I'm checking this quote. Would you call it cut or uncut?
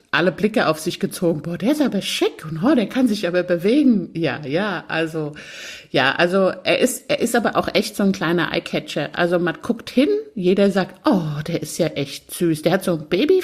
uncut